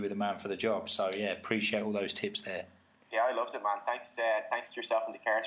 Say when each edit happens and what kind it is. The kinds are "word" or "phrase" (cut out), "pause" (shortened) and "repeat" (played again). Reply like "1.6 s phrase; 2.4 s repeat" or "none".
none

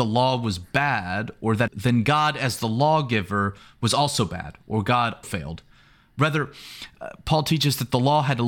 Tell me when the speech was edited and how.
1.7 s phrase; 5.2 s word

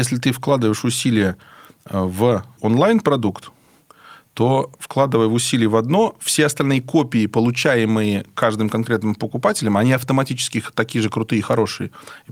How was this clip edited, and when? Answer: 2.6 s word

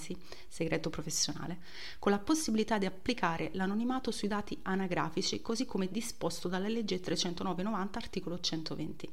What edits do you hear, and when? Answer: none

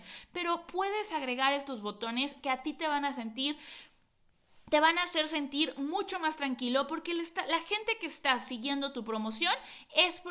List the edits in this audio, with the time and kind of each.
none

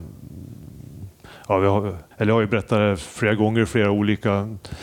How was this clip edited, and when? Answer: 2.1 s pause

